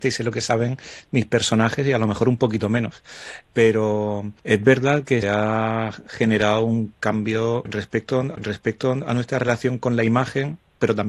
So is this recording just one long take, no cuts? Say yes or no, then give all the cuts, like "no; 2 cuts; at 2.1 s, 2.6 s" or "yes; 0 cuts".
no; 2 cuts; at 5.2 s, 8.3 s